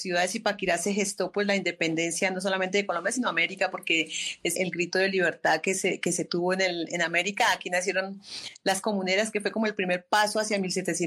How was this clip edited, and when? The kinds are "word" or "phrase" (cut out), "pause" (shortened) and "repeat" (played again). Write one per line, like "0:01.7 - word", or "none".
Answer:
0:04.5 - word
0:08.8 - word